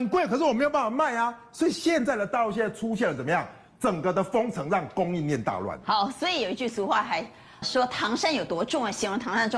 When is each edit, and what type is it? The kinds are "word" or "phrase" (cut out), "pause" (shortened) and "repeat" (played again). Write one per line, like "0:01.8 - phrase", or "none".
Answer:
0:07.6 - word